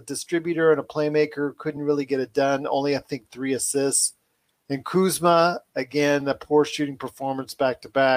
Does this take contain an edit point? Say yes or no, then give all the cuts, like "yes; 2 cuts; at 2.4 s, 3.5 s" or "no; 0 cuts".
no; 0 cuts